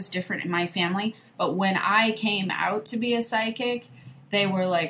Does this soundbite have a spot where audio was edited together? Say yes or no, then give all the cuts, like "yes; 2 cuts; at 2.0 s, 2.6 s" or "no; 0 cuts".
no; 0 cuts